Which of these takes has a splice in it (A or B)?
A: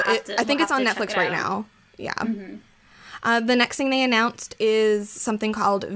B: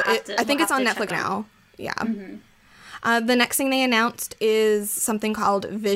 B